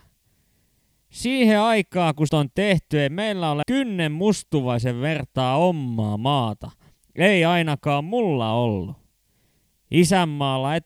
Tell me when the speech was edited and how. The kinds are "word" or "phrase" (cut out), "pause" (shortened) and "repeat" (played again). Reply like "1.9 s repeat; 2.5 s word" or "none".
2.3 s word; 3.6 s word